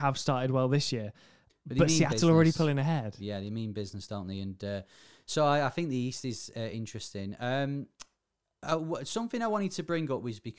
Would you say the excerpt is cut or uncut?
uncut